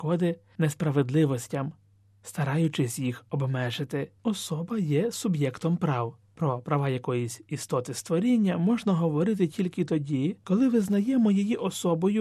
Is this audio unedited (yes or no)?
no